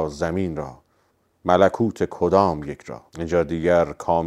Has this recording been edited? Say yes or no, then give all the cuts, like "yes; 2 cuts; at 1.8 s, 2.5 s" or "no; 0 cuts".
yes; 1 cut; at 3.1 s